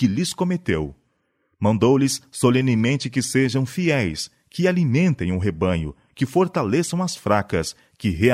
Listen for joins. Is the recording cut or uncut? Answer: uncut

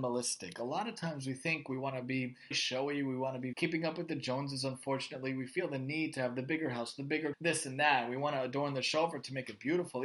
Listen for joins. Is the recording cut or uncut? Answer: cut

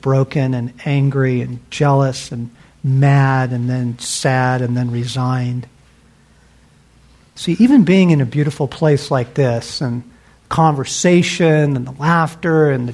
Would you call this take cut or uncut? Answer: uncut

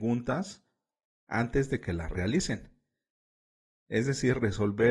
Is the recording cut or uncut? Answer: uncut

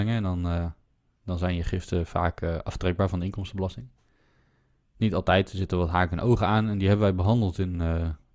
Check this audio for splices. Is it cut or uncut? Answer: uncut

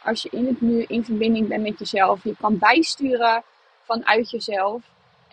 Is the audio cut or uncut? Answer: uncut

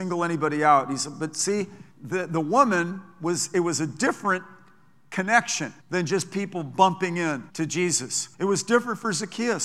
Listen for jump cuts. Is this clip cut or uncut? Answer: cut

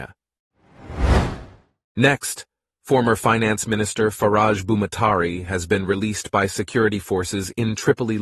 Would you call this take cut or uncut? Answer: uncut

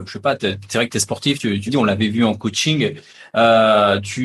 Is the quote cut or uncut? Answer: cut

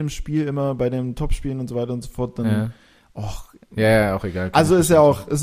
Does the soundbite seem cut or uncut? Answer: uncut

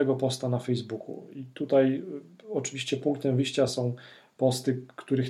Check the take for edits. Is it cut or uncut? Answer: uncut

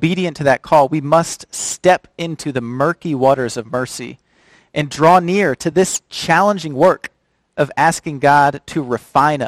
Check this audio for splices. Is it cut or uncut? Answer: uncut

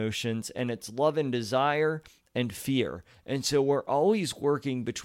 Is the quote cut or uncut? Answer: uncut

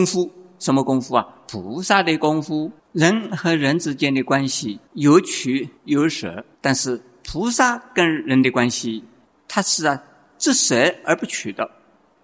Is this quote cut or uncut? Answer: cut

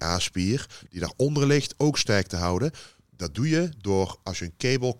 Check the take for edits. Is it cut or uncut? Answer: uncut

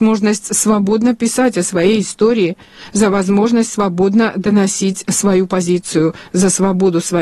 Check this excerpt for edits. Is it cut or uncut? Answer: uncut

